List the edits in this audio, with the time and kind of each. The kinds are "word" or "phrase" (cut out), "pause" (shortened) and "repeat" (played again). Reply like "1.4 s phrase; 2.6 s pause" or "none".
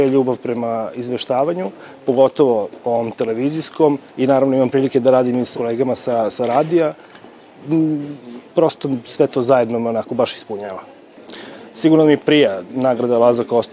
4.1 s pause; 5.5 s word; 8.5 s pause